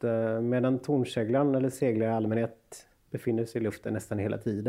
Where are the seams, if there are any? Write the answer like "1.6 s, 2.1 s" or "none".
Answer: 3.0 s